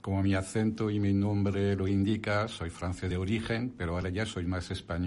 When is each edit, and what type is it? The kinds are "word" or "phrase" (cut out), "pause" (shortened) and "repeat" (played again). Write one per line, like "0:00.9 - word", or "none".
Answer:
none

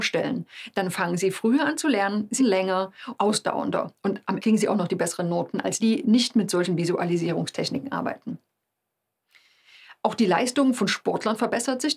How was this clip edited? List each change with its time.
0:02.4 - word
0:03.2 - word
0:04.4 - word
0:05.8 - word

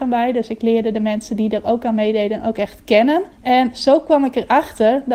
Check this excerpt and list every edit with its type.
0:03.3 - pause

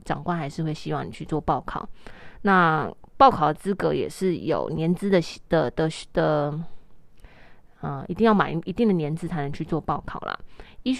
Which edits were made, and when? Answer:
none

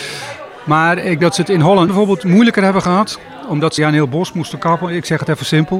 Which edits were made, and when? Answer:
0:01.2 - word
0:01.9 - word
0:03.8 - phrase

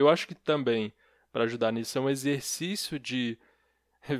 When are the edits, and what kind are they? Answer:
none

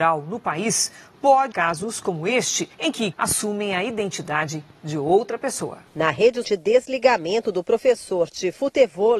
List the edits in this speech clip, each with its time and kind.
0:01.5 - word
0:02.7 - pause
0:03.1 - word
0:05.9 - pause
0:06.4 - phrase

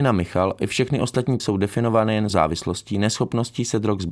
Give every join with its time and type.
0:01.4 - word
0:02.3 - word

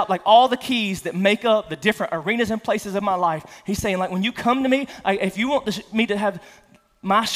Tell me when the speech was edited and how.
none

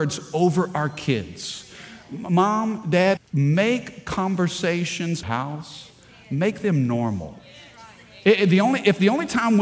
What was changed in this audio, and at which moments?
0:03.2 - word
0:05.2 - phrase

